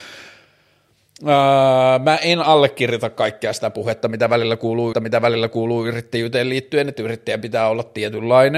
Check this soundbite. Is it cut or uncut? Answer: cut